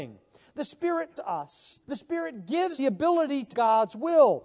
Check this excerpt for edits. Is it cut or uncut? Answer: cut